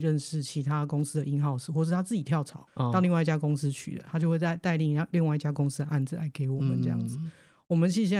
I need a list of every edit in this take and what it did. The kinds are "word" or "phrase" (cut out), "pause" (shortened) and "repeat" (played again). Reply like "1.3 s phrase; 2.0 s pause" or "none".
2.7 s pause

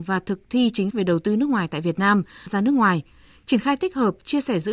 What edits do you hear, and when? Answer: 0.9 s word; 2.5 s phrase

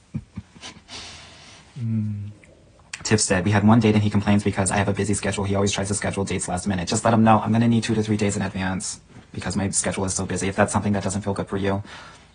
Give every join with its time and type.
9.2 s pause

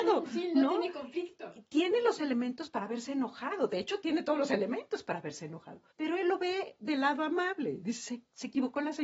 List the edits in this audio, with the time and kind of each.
2.2 s word; 5.9 s pause

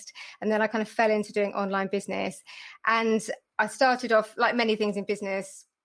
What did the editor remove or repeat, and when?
none

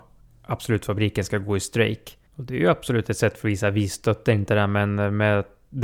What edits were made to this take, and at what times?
2.3 s pause

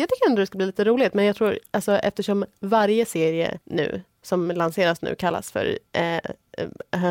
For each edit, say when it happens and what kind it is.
3.6 s pause; 5.9 s pause

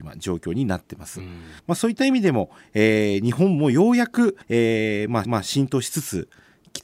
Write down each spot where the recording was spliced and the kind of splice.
1.6 s pause; 4.4 s pause; 5.2 s repeat

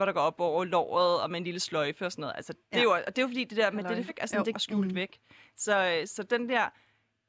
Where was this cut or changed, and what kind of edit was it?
2.6 s pause; 4.1 s word; 4.5 s phrase

